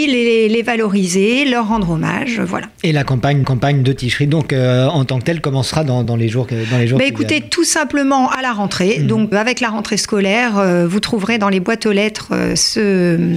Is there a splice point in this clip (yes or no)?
yes